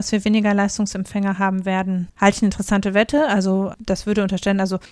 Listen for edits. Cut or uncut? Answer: uncut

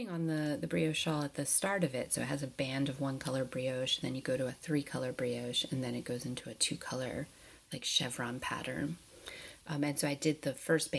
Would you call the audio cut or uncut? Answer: uncut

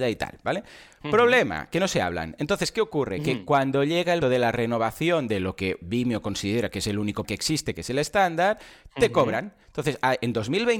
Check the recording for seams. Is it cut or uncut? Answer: cut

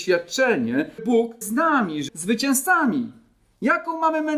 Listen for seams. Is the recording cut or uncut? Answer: cut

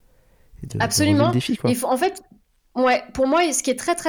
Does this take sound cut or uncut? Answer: uncut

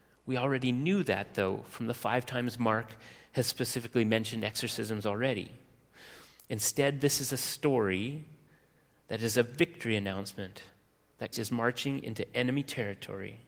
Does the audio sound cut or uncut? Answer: cut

